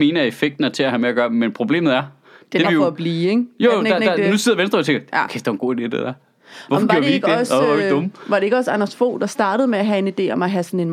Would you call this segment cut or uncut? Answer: cut